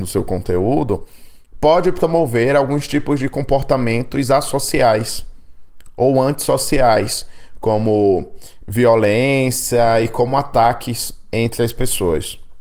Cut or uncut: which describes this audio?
uncut